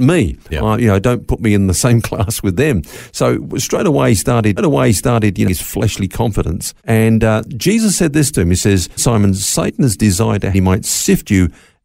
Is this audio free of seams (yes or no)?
no